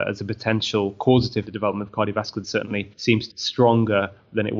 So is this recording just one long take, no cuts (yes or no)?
no